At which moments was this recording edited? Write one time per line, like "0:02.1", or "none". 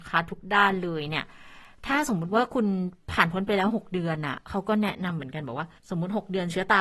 0:05.8